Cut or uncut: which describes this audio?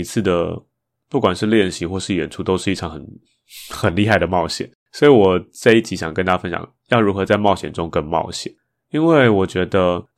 cut